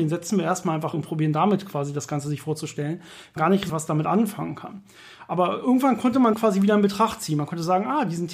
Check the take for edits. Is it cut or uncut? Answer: cut